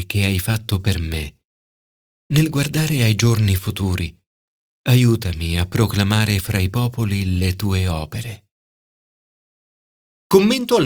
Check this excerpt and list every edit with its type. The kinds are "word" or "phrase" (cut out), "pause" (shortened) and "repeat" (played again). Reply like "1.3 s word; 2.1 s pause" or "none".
none